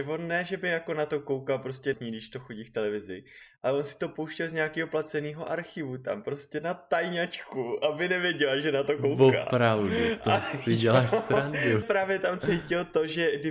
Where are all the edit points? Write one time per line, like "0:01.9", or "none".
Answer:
0:01.9
0:11.8